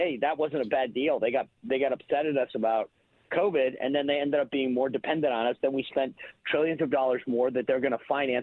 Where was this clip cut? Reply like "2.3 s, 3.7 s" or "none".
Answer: none